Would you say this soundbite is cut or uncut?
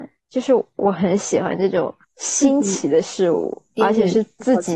cut